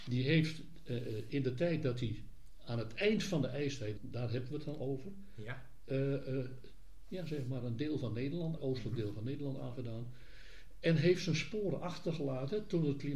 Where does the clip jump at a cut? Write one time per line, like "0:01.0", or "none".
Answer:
0:04.0
0:08.6